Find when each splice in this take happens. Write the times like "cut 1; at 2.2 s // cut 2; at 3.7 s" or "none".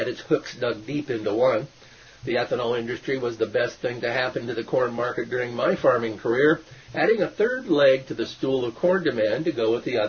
none